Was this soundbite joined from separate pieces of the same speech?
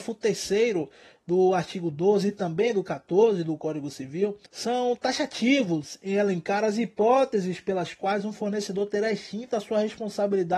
yes; 1 cut; at 4.5 s

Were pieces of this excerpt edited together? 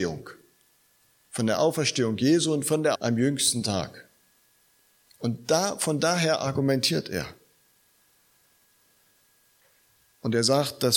yes; 1 cut; at 2.9 s

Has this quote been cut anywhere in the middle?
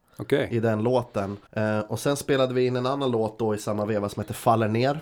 yes; 1 cut; at 1.5 s

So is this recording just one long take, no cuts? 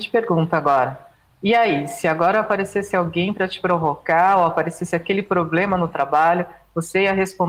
yes; 0 cuts

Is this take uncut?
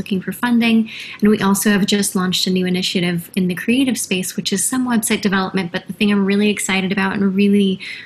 yes; 0 cuts

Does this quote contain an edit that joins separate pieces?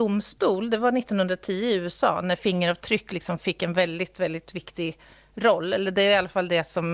no; 0 cuts

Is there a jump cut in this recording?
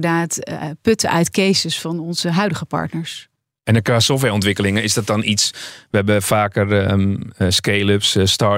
no; 0 cuts

